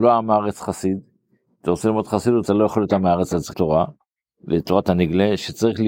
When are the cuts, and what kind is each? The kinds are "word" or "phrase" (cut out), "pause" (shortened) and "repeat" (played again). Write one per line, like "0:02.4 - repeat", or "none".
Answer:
0:02.5 - word
0:03.5 - word